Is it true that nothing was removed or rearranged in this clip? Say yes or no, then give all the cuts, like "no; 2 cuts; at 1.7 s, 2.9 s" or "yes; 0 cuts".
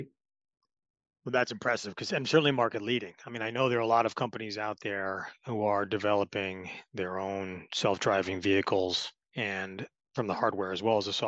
yes; 0 cuts